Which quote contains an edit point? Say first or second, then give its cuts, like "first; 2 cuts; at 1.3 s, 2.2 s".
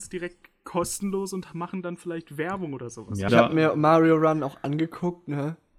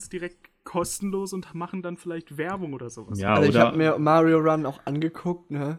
first; 1 cut; at 3.3 s